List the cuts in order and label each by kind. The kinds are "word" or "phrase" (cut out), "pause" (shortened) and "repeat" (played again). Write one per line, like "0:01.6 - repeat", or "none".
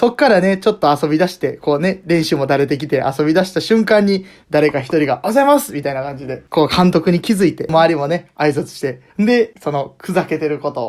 0:09.1 - pause